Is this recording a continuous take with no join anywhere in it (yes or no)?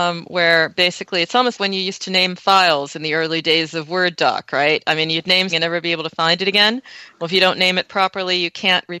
no